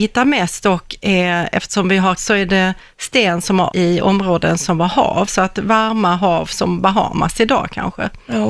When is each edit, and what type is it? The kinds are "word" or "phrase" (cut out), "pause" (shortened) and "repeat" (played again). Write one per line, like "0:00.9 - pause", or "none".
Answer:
0:02.2 - word
0:03.7 - word
0:05.3 - word